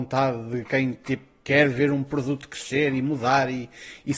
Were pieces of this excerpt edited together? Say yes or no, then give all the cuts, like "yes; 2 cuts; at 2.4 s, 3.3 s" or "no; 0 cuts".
no; 0 cuts